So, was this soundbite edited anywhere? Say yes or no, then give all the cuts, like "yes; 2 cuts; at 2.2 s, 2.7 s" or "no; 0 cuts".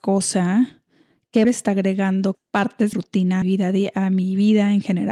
yes; 4 cuts; at 1.4 s, 2.3 s, 2.9 s, 3.4 s